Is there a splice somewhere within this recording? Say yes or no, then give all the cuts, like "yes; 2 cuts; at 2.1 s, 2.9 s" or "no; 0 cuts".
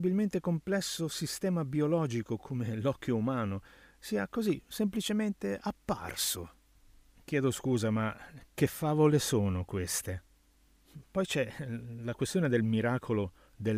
no; 0 cuts